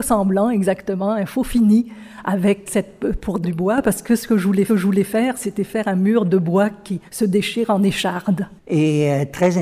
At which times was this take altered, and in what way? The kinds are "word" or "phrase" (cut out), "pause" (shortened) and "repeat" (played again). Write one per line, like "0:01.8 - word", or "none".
0:02.7 - word
0:03.4 - phrase
0:04.7 - repeat
0:07.1 - pause
0:08.6 - pause